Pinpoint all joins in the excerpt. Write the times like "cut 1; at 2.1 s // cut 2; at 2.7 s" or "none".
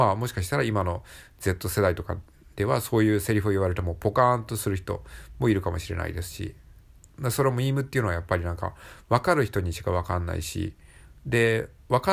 none

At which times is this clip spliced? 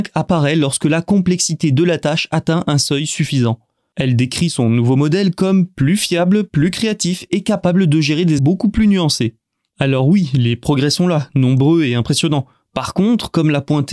cut 1; at 8.4 s

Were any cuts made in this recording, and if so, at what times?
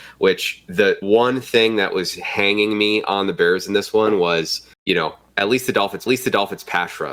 cut 1; at 1.0 s // cut 2; at 4.7 s // cut 3; at 6.1 s

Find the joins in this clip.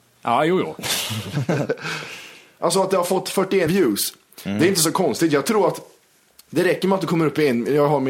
cut 1; at 3.7 s

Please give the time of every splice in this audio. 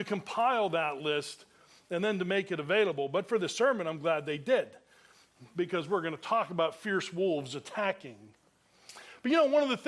none

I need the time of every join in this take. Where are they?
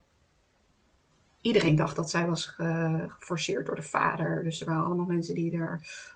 none

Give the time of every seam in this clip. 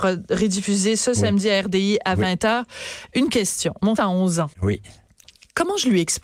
cut 1; at 4.0 s // cut 2; at 4.5 s

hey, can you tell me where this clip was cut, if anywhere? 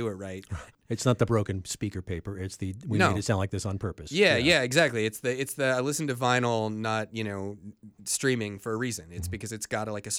cut 1; at 8.0 s

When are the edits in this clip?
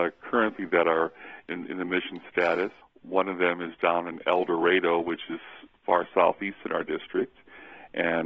cut 1; at 2.8 s

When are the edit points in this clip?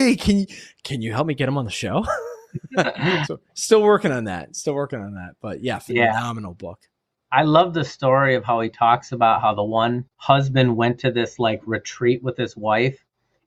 cut 1; at 10.1 s

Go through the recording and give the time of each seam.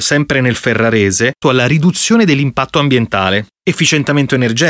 cut 1; at 1.4 s // cut 2; at 3.6 s

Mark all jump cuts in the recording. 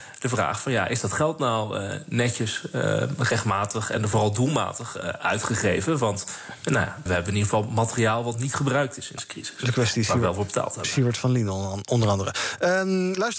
cut 1; at 7.1 s // cut 2; at 9.2 s

